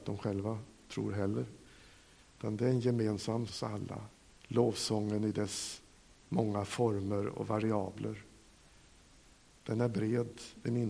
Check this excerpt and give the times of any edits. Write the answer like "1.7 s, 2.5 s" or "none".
3.5 s, 4.3 s